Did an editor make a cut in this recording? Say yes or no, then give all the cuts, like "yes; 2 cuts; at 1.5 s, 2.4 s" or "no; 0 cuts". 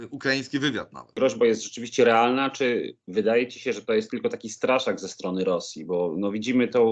no; 0 cuts